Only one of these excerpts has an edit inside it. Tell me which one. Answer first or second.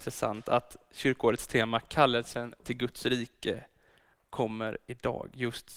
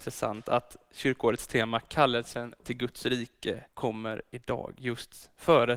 second